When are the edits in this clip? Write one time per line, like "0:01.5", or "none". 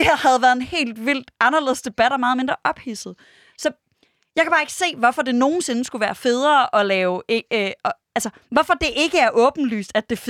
0:01.3

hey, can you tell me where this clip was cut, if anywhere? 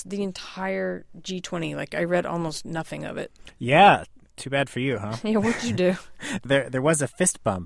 0:06.4

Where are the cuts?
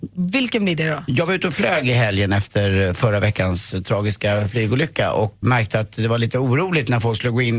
0:05.4

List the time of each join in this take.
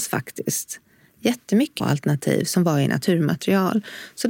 0:01.8

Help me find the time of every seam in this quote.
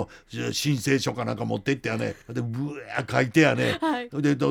0:02.2

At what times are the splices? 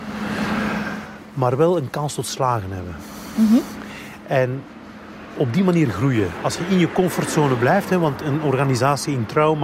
none

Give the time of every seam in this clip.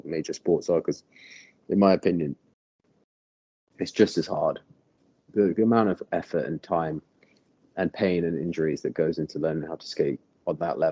none

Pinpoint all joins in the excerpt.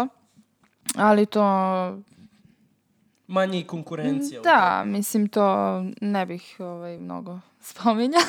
none

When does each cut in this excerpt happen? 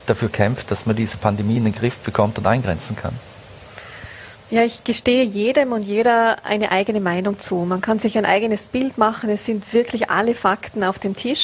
none

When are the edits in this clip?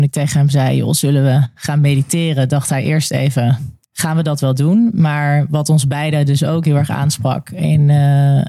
0:03.8

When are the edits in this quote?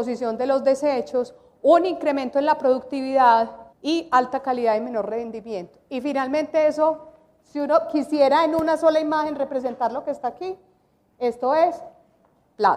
0:03.7

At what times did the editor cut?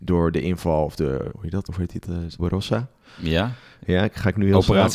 0:01.3
0:01.7
0:02.4

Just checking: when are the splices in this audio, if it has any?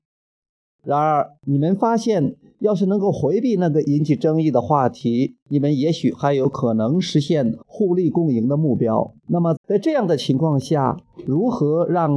0:01.4
0:05.4
0:07.6
0:09.2
0:09.6

